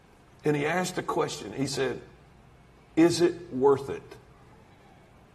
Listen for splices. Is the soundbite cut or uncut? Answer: uncut